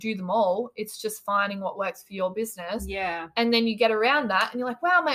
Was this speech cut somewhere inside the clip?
no; 0 cuts

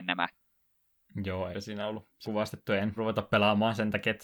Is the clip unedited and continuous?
no; 3 cuts; at 1.5 s, 2.2 s, 3.0 s

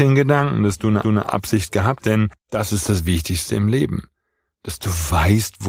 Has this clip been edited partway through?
yes; 3 cuts; at 1.0 s, 2.0 s, 2.4 s

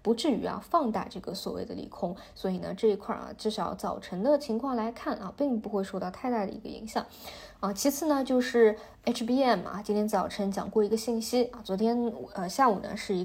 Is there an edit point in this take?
no; 0 cuts

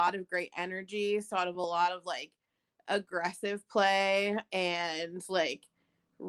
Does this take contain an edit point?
no; 0 cuts

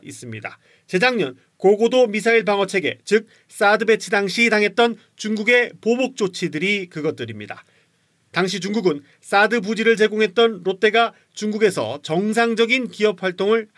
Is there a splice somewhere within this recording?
no; 0 cuts

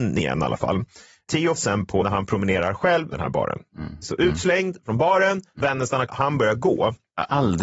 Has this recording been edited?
yes; 6 cuts; at 1.6 s, 2.0 s, 3.1 s, 4.0 s, 5.6 s, 6.1 s

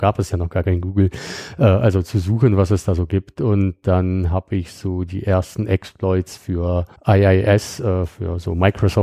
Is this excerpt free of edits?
no; 1 cut; at 7.0 s

